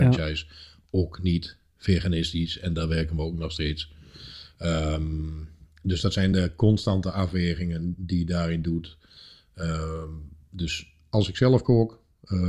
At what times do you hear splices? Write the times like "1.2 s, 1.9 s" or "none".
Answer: none